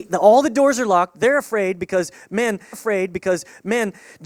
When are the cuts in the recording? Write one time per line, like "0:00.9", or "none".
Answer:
0:02.7